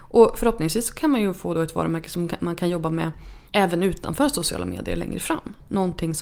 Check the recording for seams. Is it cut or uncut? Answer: cut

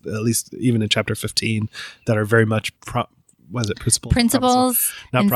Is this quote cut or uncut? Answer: cut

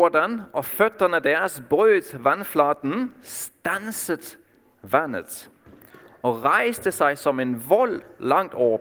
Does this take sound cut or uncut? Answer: uncut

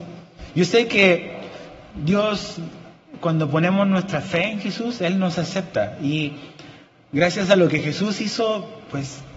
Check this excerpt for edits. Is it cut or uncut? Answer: uncut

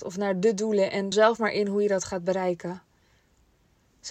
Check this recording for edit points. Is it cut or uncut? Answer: cut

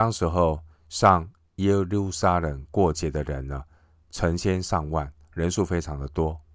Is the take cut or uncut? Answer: uncut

